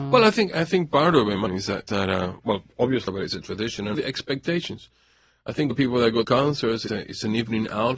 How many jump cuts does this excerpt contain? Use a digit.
7